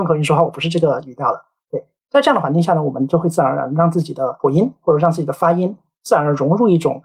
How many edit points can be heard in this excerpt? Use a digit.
0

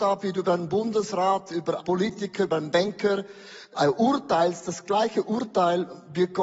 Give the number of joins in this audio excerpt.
2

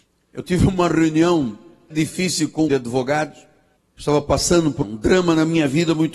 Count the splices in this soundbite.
4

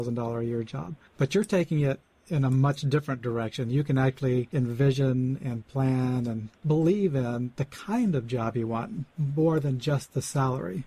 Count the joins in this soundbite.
0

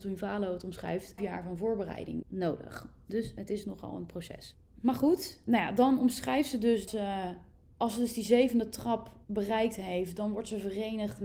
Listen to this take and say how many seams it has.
6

